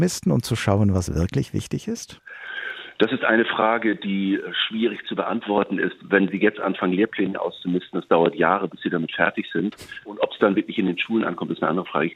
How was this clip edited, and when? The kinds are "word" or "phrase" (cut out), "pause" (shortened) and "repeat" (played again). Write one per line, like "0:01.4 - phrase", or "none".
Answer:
none

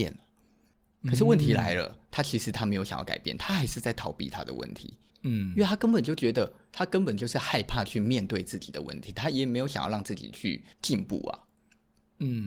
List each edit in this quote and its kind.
0:05.1 - pause
0:10.7 - pause

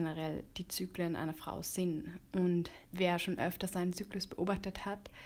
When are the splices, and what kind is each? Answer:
0:02.8 - pause

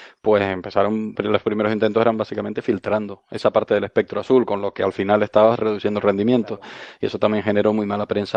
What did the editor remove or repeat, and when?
0:01.1 - word

